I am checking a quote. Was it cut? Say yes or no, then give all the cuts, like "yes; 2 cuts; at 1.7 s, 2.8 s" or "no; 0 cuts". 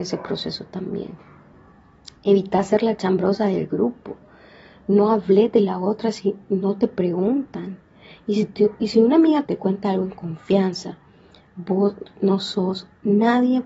yes; 1 cut; at 9.4 s